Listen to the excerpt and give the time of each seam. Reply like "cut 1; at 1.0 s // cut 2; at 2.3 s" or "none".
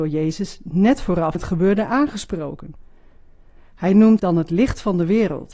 cut 1; at 1.3 s // cut 2; at 4.2 s